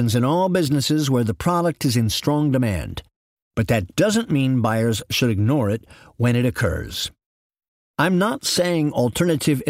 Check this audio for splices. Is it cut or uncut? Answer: uncut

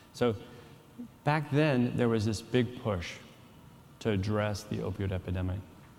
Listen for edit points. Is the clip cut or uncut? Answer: uncut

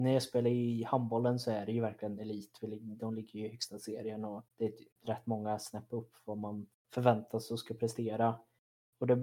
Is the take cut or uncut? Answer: cut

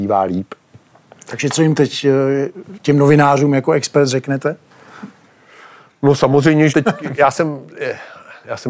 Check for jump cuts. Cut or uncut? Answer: cut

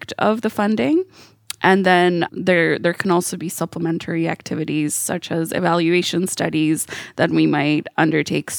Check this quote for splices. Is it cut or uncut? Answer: cut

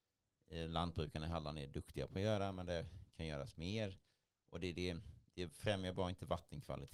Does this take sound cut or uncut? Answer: uncut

